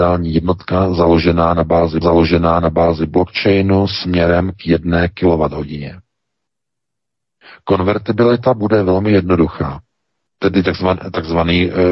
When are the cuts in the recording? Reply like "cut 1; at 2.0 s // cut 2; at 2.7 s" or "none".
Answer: cut 1; at 2.0 s